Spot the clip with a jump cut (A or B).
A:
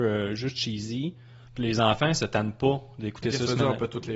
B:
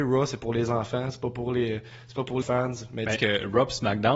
B